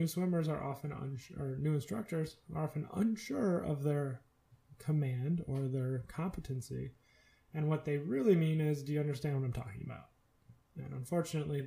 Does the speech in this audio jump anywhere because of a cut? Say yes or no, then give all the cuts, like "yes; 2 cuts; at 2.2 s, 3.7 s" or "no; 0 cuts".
no; 0 cuts